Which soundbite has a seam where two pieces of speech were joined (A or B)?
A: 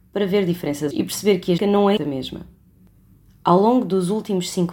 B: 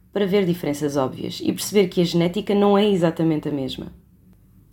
A